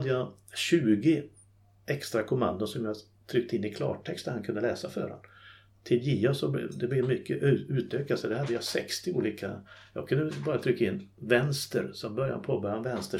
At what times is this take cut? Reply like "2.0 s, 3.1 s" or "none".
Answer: none